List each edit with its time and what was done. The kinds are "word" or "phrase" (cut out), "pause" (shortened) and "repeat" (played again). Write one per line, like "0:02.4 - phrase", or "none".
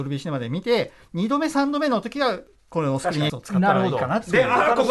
0:03.3 - word